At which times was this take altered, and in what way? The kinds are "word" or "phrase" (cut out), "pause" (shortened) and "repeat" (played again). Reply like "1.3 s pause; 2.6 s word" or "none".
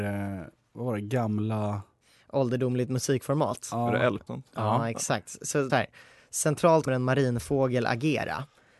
2.0 s pause; 4.3 s phrase; 5.7 s phrase; 6.9 s word